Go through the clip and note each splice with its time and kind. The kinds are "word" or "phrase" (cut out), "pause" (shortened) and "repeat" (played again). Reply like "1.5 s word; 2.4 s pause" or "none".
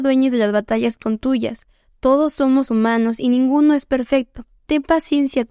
1.0 s word; 2.7 s word